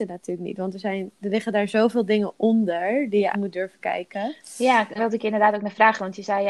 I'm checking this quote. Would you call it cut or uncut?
cut